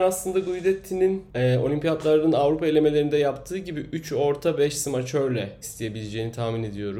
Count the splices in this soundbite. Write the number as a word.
one